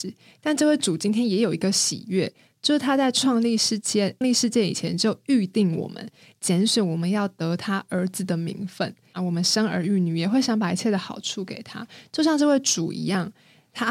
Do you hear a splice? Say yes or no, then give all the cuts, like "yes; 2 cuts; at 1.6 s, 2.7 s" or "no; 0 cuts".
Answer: yes; 1 cut; at 4.2 s